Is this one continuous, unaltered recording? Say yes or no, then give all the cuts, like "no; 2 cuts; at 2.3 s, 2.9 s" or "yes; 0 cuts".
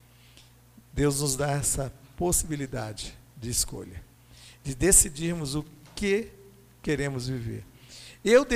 yes; 0 cuts